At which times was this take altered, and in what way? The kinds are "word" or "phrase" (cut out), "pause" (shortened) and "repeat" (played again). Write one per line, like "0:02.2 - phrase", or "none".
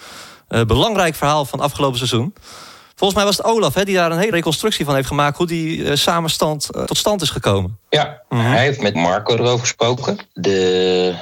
0:04.3 - word
0:06.9 - word
0:09.0 - word